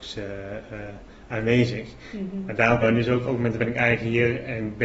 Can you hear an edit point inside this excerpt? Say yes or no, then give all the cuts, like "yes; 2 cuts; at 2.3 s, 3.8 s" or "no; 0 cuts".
yes; 2 cuts; at 2.8 s, 3.6 s